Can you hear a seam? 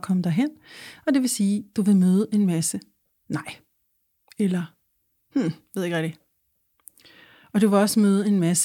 no; 0 cuts

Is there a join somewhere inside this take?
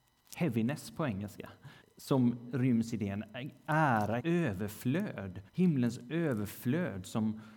yes; 3 cuts; at 1.8 s, 4.2 s, 5.5 s

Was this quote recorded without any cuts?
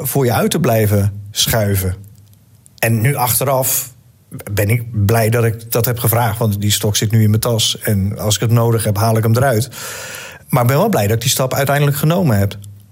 yes; 0 cuts

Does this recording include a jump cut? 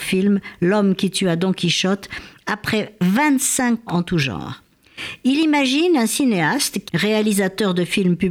yes; 2 cuts; at 3.9 s, 6.9 s

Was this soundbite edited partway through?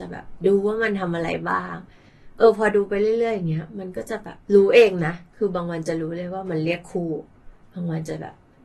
yes; 1 cut; at 4.4 s

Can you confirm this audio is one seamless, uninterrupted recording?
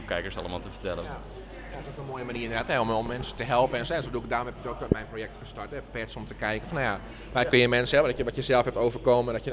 yes; 0 cuts

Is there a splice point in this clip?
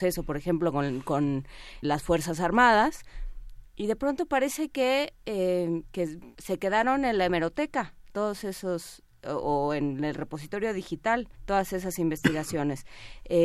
yes; 3 cuts; at 1.8 s, 6.3 s, 11.3 s

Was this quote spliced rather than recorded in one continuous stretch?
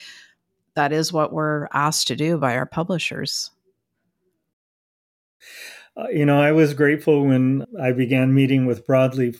no; 0 cuts

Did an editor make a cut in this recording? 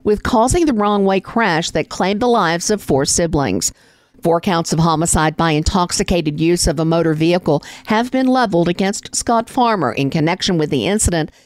no; 0 cuts

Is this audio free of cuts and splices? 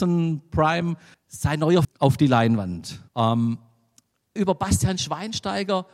no; 4 cuts; at 1.1 s, 1.8 s, 3.1 s, 4.4 s

